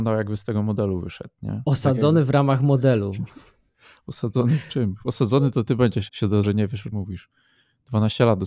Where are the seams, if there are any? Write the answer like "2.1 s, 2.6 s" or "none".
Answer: 6.1 s, 6.4 s, 6.9 s